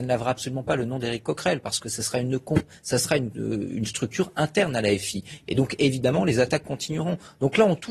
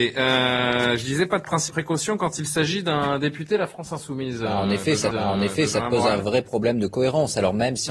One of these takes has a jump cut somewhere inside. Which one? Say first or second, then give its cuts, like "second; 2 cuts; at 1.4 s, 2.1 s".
second; 2 cuts; at 1.7 s, 5.1 s